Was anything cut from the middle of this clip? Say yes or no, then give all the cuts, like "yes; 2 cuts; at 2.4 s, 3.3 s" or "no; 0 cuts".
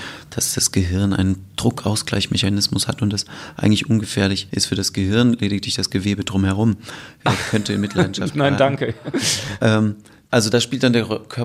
no; 0 cuts